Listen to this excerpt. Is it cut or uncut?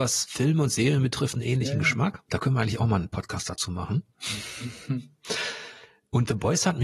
uncut